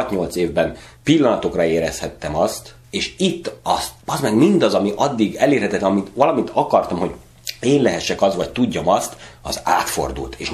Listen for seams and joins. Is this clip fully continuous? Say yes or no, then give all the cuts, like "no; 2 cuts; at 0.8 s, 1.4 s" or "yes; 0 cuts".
no; 3 cuts; at 1.0 s, 2.8 s, 4.0 s